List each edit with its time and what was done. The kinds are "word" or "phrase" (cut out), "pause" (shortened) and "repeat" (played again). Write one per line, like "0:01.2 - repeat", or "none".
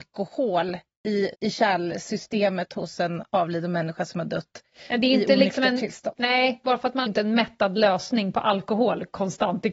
0:01.3 - pause
0:07.1 - phrase